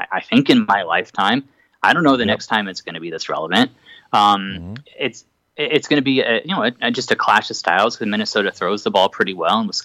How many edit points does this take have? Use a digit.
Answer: 0